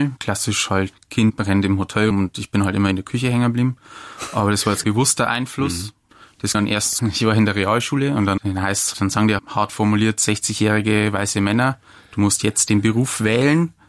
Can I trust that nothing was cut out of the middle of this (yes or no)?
no